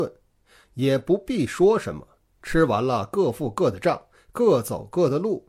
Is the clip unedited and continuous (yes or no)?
yes